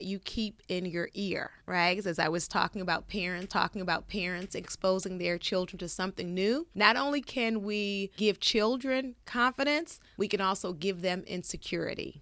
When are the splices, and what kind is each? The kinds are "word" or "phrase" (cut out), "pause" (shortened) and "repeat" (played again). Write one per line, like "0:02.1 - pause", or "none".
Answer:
0:01.6 - pause
0:03.5 - repeat